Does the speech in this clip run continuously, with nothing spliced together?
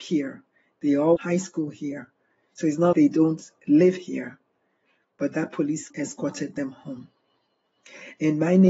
no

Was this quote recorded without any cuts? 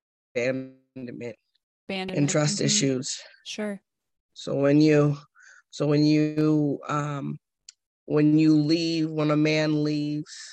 yes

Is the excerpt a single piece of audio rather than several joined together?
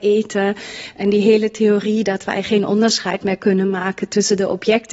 yes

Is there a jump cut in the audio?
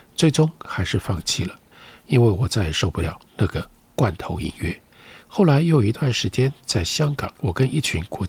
yes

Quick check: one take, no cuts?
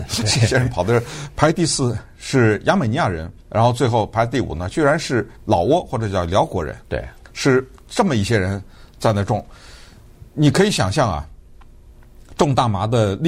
no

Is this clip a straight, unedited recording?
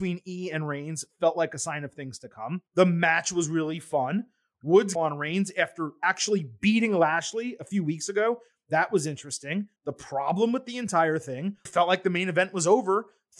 no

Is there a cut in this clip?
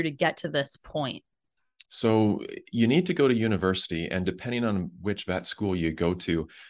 yes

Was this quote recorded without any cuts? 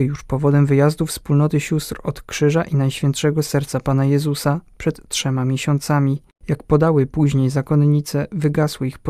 yes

